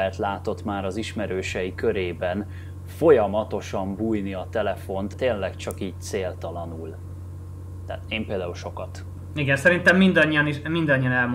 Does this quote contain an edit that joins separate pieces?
yes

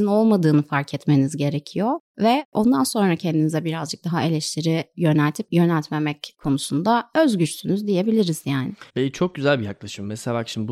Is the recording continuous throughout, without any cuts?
no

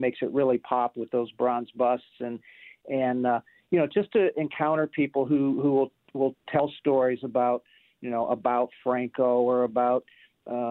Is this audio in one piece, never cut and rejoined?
yes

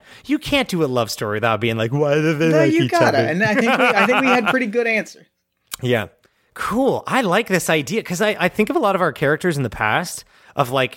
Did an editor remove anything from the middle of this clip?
no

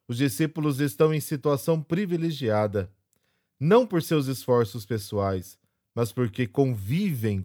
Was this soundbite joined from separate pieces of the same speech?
no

